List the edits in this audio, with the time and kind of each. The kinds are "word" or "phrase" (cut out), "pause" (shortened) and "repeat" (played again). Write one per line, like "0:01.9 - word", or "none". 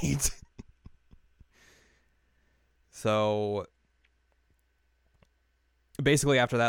none